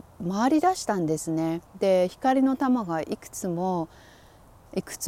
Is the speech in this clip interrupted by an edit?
yes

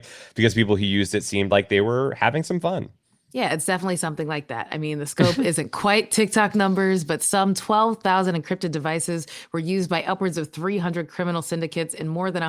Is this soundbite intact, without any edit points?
yes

